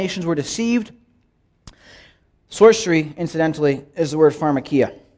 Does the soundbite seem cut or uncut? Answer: uncut